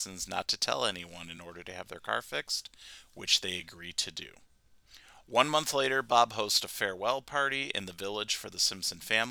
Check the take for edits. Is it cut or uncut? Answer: uncut